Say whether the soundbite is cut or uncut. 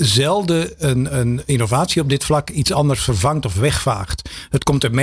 uncut